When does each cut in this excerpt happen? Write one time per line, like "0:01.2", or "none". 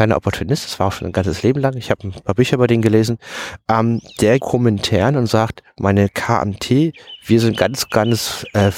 0:04.4